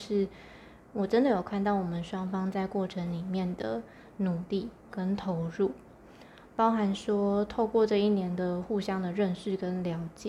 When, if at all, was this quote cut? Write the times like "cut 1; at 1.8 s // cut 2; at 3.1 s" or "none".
cut 1; at 4.8 s